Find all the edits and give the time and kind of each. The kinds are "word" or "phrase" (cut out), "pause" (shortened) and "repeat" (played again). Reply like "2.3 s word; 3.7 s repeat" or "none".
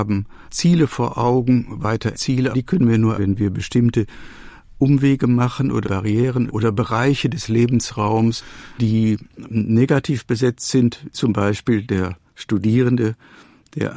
2.1 s word; 2.5 s word; 3.2 s word; 5.8 s word; 6.5 s word; 8.7 s word; 11.1 s word